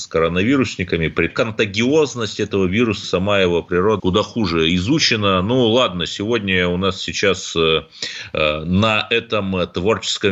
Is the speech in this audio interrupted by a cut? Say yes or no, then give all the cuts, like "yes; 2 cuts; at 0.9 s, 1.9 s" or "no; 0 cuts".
yes; 3 cuts; at 1.3 s, 3.0 s, 4.0 s